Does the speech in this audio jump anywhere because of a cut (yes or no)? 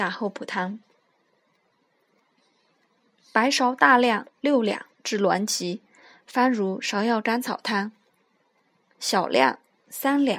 no